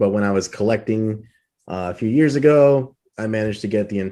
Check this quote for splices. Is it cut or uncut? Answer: uncut